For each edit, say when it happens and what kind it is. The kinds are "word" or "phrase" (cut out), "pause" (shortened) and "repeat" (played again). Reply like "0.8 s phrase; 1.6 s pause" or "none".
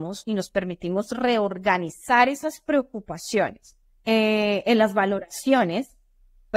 3.9 s pause